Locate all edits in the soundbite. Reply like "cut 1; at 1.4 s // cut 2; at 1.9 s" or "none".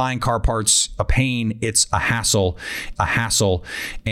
cut 1; at 1.0 s // cut 2; at 3.0 s